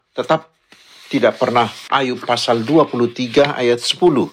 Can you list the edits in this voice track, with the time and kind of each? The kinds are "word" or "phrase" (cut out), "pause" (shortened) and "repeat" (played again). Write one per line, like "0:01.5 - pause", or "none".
0:01.9 - phrase